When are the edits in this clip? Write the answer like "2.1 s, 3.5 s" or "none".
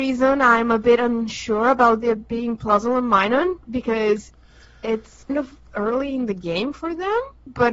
5.3 s

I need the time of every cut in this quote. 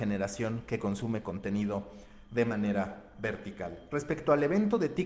none

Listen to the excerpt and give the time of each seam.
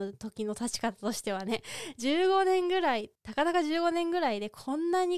3.2 s

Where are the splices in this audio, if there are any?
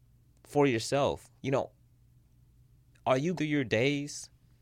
1.4 s, 3.4 s

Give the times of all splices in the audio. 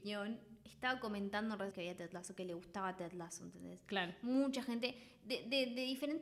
1.7 s

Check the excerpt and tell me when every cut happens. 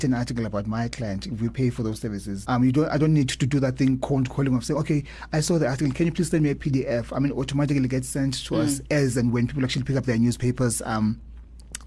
2.5 s

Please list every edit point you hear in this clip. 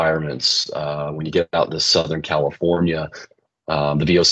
none

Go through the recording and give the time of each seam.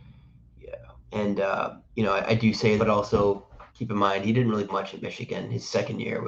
1.0 s, 1.8 s, 2.8 s, 3.7 s, 4.7 s

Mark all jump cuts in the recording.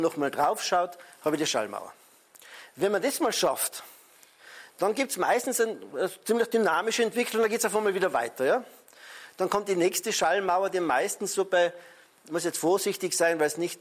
none

